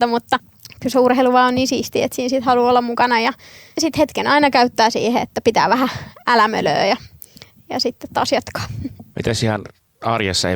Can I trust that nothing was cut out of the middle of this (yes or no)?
yes